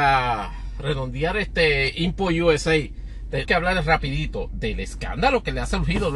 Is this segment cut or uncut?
cut